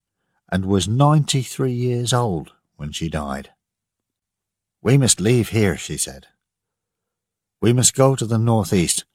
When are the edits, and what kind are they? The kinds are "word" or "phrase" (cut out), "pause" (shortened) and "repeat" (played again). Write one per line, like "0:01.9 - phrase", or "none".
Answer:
none